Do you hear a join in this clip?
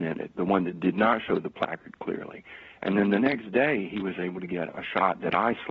no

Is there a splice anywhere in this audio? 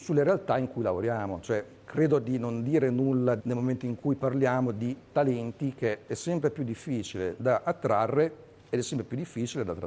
yes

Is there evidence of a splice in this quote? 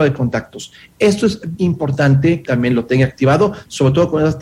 yes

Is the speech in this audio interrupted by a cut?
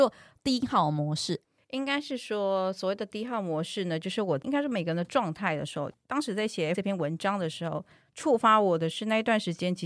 yes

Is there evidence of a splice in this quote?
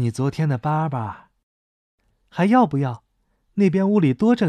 no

